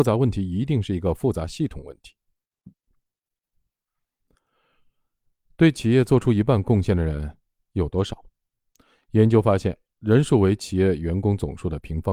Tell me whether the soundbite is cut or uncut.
uncut